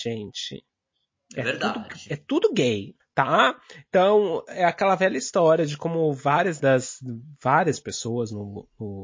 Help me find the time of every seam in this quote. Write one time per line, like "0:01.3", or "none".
0:03.0